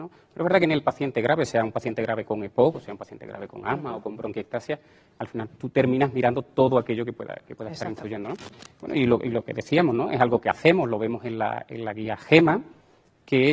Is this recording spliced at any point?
no; 0 cuts

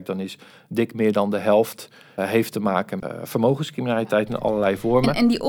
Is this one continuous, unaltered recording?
no; 2 cuts; at 2.2 s, 3.0 s

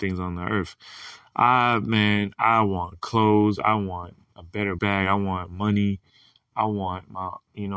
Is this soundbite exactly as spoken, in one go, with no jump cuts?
no; 1 cut; at 4.8 s

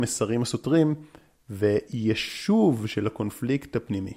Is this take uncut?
yes; 0 cuts

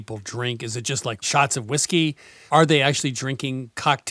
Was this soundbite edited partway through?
no; 0 cuts

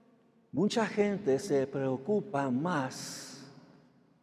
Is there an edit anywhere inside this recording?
no; 0 cuts

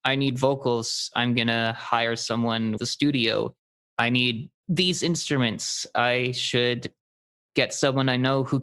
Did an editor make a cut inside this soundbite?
yes; 2 cuts; at 2.8 s, 3.9 s

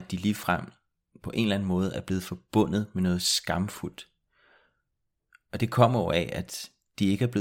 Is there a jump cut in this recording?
no; 0 cuts

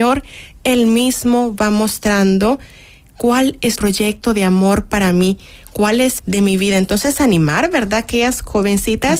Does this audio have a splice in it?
yes; 2 cuts; at 3.8 s, 6.2 s

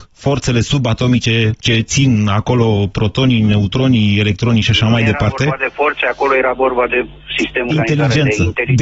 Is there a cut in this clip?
yes; 2 cuts; at 1.6 s, 7.7 s

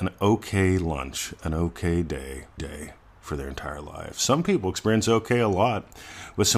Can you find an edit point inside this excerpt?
yes; 1 cut; at 2.6 s

